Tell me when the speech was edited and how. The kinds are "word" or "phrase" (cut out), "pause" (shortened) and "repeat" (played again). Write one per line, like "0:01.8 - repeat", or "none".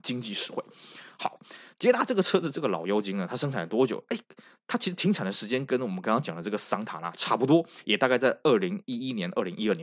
none